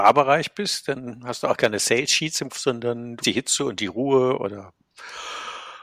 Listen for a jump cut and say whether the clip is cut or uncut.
cut